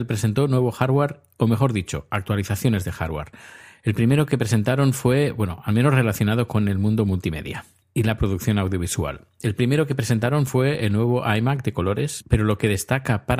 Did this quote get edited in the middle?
no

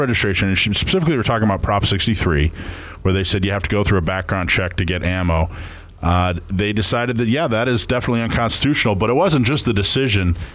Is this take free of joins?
yes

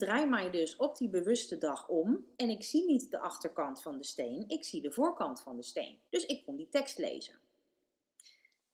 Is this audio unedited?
no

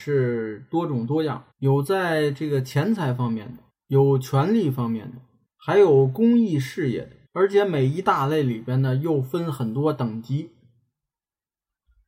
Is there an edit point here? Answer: yes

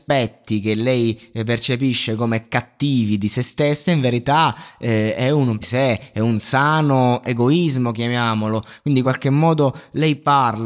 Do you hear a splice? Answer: yes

